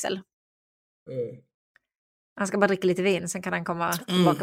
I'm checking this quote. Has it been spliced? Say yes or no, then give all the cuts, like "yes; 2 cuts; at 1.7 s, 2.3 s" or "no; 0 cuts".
no; 0 cuts